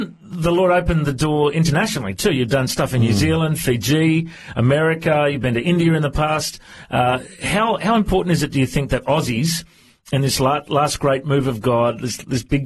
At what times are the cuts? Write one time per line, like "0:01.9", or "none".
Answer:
none